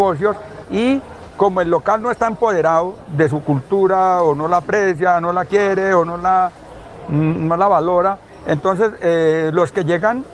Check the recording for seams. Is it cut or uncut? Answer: uncut